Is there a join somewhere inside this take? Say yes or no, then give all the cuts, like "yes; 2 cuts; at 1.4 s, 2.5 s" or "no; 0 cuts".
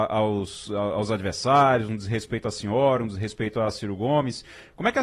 no; 0 cuts